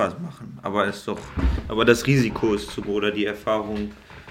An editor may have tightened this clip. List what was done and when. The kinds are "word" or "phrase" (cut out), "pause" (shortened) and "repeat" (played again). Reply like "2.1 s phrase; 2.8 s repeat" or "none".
none